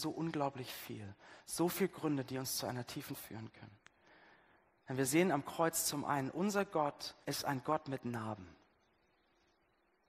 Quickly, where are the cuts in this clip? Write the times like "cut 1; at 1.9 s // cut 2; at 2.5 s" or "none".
cut 1; at 3.1 s // cut 2; at 7.2 s